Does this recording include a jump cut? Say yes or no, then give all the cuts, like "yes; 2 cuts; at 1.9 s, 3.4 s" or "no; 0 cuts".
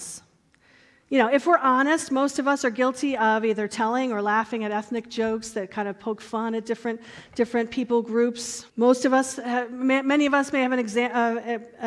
yes; 1 cut; at 8.7 s